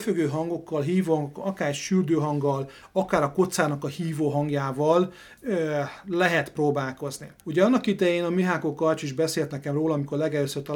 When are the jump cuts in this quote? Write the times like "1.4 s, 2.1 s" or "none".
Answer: 5.4 s, 7.4 s